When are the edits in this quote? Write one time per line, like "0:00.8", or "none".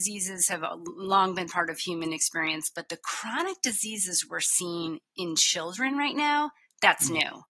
none